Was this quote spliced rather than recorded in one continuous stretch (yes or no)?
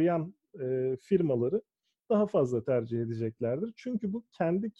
no